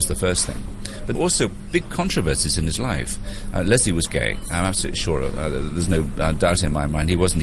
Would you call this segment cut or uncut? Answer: cut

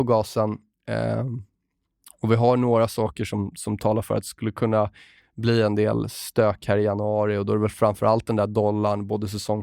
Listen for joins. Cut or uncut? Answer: uncut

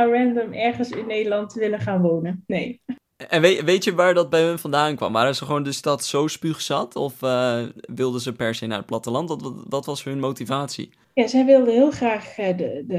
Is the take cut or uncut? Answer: cut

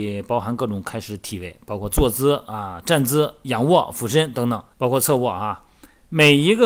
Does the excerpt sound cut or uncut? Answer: cut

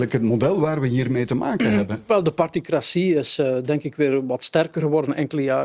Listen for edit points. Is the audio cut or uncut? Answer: uncut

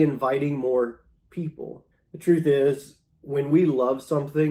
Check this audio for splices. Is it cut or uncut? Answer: cut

